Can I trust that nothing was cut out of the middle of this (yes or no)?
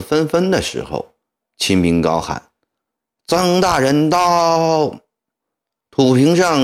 yes